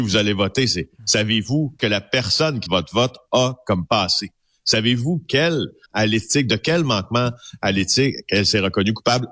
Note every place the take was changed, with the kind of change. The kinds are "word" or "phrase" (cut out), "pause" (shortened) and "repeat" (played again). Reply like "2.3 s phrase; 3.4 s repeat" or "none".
1.8 s word; 2.7 s word; 5.9 s word